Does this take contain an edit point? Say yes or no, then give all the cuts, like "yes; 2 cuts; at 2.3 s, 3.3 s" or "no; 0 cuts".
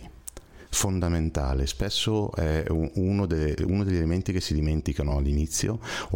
no; 0 cuts